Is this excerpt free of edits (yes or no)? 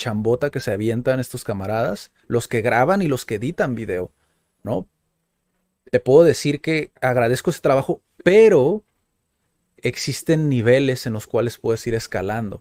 yes